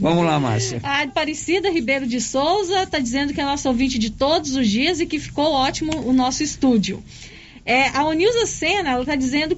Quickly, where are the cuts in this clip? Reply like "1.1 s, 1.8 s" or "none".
1.1 s